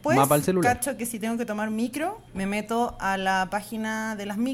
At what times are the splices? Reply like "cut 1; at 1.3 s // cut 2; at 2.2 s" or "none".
cut 1; at 2.3 s